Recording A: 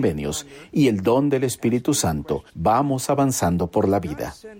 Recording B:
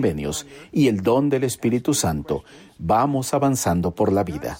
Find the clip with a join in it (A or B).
A